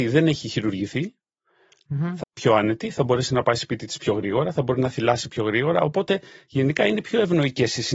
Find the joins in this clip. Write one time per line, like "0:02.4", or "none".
0:02.2